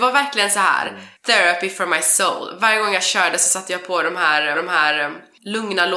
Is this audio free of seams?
no; 2 cuts; at 1.2 s, 4.5 s

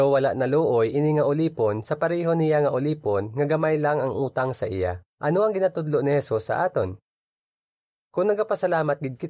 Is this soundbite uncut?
no; 1 cut; at 5.1 s

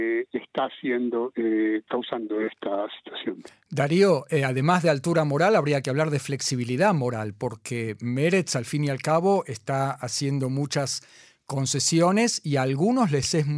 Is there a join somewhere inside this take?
no; 0 cuts

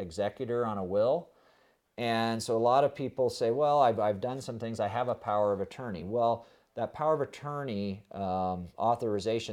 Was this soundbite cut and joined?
no; 0 cuts

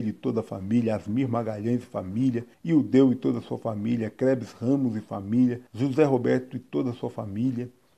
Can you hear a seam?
yes; 2 cuts; at 2.5 s, 5.7 s

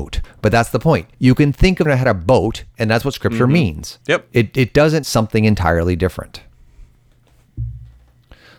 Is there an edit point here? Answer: yes; 4 cuts; at 1.1 s, 1.9 s, 4.0 s, 5.0 s

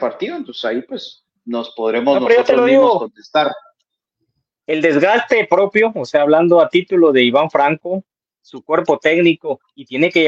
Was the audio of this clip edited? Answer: no; 0 cuts

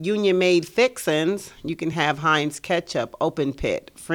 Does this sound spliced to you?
no; 0 cuts

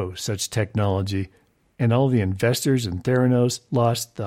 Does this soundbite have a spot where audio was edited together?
no; 0 cuts

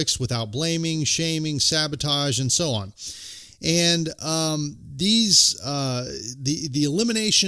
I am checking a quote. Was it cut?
no; 0 cuts

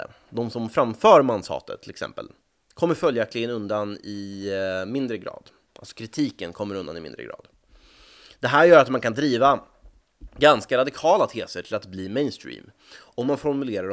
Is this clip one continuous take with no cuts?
yes; 0 cuts

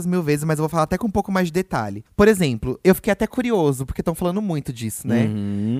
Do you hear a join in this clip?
no; 0 cuts

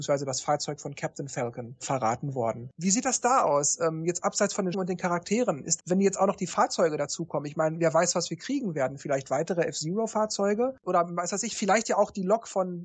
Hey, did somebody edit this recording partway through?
yes; 2 cuts; at 4.7 s, 5.8 s

